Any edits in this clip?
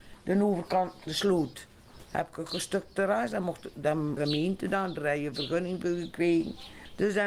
yes; 2 cuts; at 1.1 s, 4.2 s

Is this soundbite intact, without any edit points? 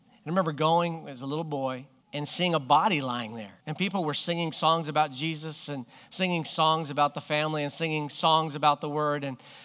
no; 2 cuts; at 2.0 s, 3.6 s

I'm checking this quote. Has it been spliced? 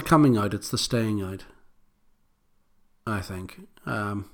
no; 0 cuts

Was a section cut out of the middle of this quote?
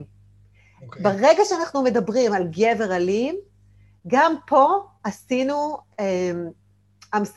no; 0 cuts

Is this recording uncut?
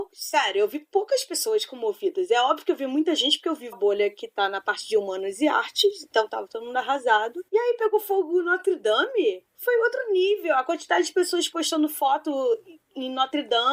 no; 4 cuts; at 3.7 s, 7.5 s, 9.5 s, 12.8 s

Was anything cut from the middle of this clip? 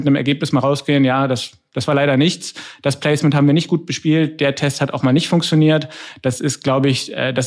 no; 0 cuts

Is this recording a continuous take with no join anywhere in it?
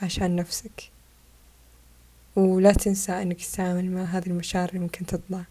yes; 0 cuts

